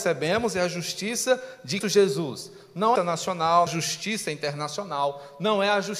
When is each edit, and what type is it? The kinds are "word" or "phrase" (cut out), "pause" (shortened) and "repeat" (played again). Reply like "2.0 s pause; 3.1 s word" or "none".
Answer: 1.8 s word; 3.0 s phrase; 3.7 s phrase